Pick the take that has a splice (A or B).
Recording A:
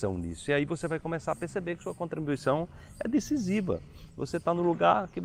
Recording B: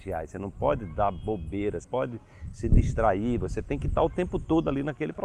B